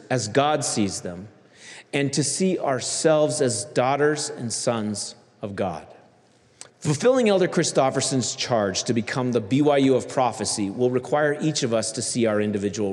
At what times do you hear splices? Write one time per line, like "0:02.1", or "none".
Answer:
0:06.7